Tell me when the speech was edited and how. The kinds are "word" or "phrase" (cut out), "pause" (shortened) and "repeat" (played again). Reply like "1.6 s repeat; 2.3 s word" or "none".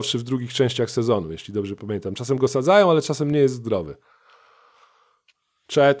none